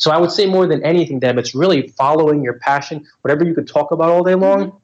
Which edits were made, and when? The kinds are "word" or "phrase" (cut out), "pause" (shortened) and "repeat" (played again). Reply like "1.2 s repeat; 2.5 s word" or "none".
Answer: none

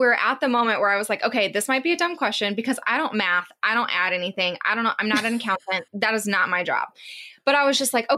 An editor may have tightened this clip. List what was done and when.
none

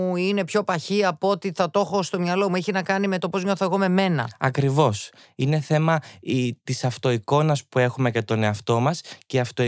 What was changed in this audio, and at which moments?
none

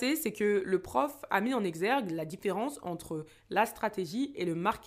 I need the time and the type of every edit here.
none

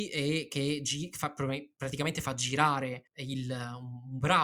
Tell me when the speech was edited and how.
3.1 s pause

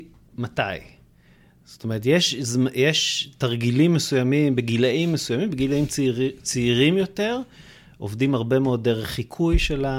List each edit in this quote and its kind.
none

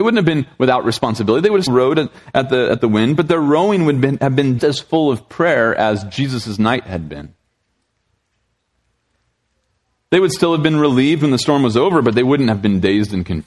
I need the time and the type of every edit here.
1.7 s word; 4.6 s word

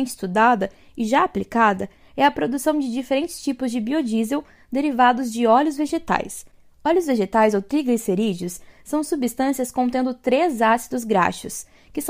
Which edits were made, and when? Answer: none

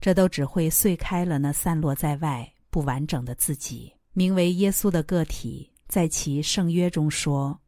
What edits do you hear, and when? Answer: 4.0 s pause

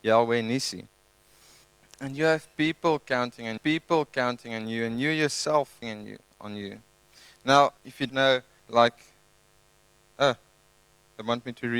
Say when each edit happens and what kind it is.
1.6 s pause; 3.6 s repeat; 5.8 s phrase; 7.8 s pause; 8.1 s word; 8.6 s word

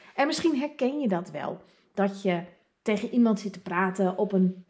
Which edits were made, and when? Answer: none

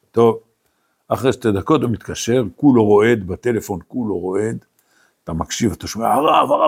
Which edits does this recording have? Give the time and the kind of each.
none

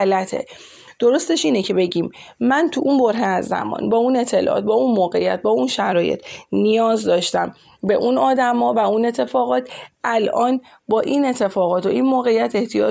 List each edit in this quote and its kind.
none

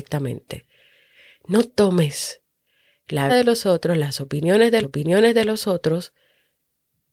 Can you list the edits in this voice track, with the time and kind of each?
1.7 s word; 3.3 s word; 4.8 s repeat

